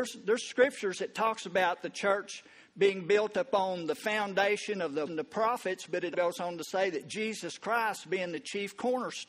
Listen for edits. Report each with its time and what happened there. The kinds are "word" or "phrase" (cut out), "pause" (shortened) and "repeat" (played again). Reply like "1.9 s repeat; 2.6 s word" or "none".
5.1 s word; 6.1 s word